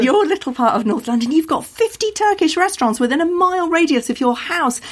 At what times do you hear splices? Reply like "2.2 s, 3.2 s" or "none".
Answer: none